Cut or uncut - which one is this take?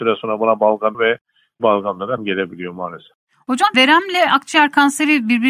cut